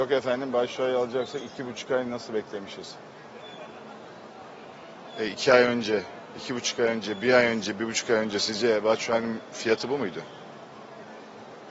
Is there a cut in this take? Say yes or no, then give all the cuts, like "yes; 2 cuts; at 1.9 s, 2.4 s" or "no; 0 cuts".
no; 0 cuts